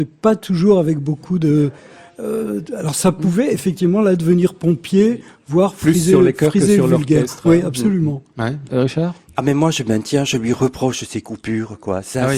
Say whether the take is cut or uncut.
uncut